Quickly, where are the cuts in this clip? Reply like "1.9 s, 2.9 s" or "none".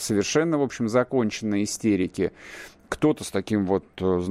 none